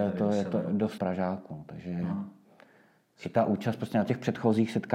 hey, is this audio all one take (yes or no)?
no